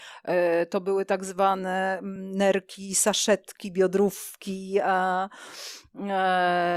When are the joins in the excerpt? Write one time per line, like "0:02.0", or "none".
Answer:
none